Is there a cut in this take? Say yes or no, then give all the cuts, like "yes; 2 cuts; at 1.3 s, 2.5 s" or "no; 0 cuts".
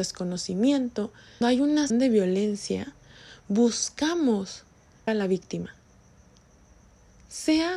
yes; 3 cuts; at 1.4 s, 1.9 s, 5.1 s